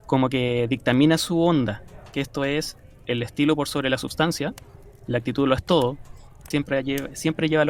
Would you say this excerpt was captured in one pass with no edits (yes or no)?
yes